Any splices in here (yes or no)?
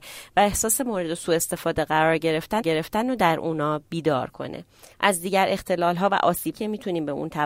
yes